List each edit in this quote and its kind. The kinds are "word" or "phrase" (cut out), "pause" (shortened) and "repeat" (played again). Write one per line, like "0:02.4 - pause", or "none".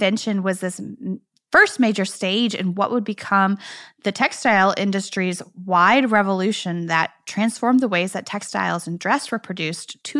none